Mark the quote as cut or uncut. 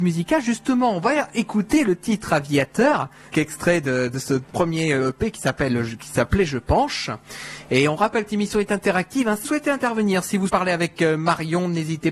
cut